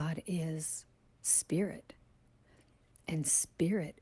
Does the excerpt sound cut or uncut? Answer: uncut